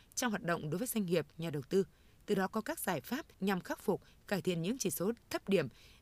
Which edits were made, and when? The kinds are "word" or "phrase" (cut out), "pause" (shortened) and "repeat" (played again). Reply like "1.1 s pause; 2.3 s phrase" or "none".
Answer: 3.3 s pause